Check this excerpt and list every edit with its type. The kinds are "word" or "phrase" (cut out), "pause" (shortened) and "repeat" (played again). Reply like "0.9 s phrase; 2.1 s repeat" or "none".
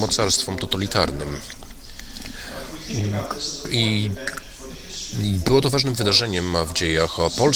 none